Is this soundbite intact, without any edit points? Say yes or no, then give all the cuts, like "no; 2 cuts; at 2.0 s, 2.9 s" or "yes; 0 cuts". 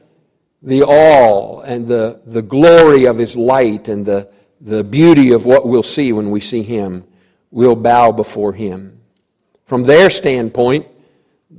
yes; 0 cuts